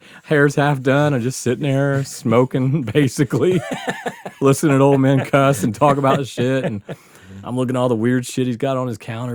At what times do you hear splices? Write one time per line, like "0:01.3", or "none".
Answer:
none